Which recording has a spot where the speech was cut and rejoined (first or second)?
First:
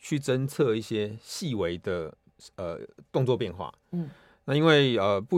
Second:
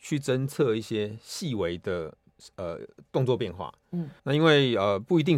second